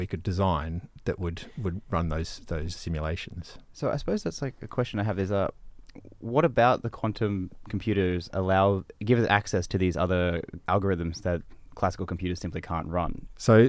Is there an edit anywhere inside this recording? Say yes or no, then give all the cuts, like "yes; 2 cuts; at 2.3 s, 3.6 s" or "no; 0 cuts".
yes; 2 cuts; at 2.8 s, 10.6 s